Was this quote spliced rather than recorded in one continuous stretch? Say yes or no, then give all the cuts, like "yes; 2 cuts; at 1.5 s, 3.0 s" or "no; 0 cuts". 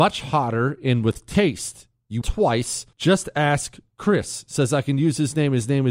yes; 2 cuts; at 2.2 s, 2.9 s